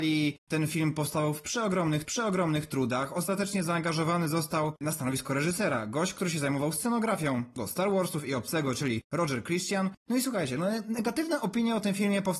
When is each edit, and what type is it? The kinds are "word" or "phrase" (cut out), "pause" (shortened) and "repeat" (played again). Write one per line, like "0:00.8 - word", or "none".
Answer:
0:02.0 - repeat